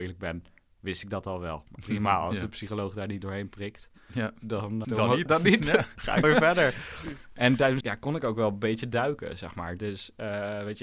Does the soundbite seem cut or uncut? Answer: cut